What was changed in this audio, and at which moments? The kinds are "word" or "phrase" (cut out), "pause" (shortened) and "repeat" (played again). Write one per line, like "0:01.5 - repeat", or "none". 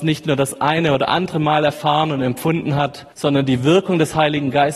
0:03.1 - pause